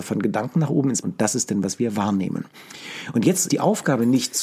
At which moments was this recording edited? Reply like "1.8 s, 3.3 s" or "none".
1.0 s, 3.5 s